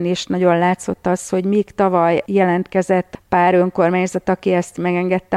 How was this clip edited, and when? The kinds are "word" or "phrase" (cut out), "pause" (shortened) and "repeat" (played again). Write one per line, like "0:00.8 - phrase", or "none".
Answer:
none